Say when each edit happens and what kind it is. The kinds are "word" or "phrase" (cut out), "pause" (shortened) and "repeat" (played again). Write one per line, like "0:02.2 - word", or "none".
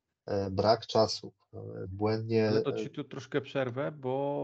0:01.9 - phrase
0:02.6 - word

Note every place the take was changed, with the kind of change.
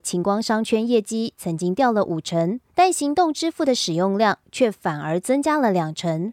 0:02.7 - pause

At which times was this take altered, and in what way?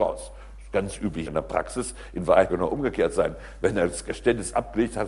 0:01.3 - word
0:02.5 - phrase

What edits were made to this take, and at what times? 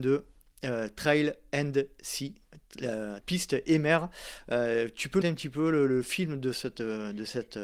0:03.2 - word
0:05.2 - word

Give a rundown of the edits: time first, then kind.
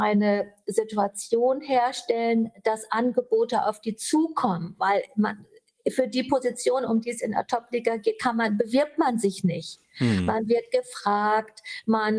none

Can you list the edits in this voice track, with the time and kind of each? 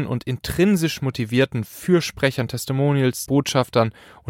0:03.3 - word

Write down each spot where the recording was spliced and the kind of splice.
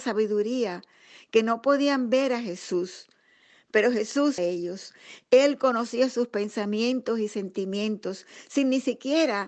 0:04.4 - phrase

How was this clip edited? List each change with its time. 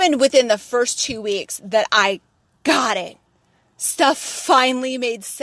none

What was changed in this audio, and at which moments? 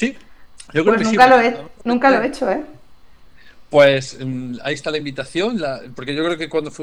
none

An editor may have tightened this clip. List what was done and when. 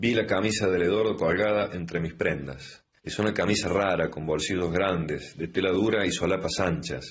none

